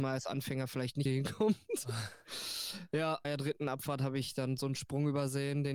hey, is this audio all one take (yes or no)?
no